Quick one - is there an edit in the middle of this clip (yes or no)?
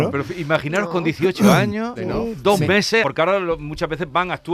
yes